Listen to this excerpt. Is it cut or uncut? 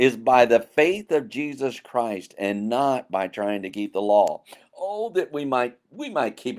uncut